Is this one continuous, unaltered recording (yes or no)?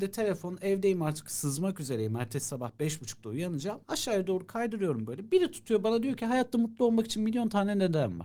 no